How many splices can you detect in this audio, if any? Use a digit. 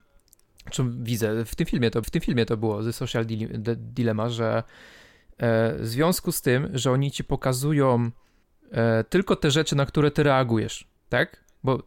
2